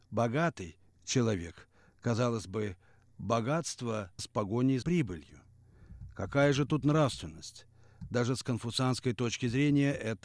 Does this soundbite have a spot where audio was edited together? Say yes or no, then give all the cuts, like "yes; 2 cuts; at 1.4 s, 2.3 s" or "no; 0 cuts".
yes; 2 cuts; at 4.2 s, 4.8 s